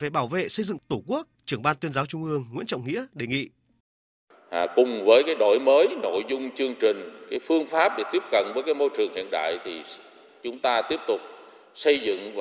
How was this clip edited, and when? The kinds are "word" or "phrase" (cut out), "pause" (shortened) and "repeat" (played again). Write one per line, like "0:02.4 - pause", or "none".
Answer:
0:01.3 - pause